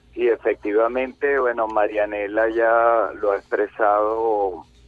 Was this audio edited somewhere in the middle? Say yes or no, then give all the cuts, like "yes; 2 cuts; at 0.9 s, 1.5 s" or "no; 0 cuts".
no; 0 cuts